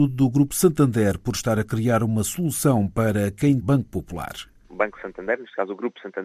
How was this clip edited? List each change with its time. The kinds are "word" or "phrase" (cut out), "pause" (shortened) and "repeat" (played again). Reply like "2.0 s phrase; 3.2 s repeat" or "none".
3.6 s phrase